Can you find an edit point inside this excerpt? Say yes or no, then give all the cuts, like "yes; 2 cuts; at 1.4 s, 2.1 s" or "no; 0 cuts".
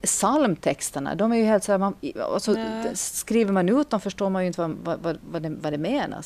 no; 0 cuts